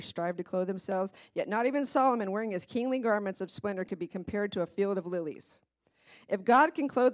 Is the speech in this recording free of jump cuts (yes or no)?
yes